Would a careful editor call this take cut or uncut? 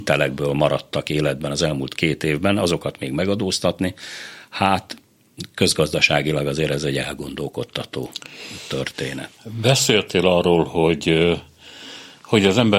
uncut